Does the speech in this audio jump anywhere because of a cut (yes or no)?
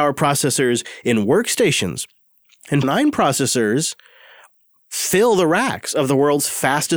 yes